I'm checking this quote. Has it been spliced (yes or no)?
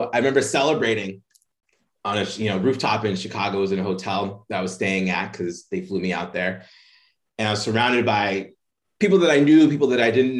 no